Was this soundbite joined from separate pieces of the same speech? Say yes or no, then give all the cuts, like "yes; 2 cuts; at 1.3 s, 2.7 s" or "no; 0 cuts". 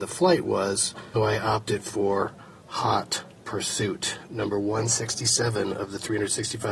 yes; 1 cut; at 1.2 s